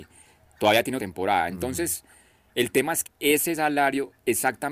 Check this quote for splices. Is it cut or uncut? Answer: cut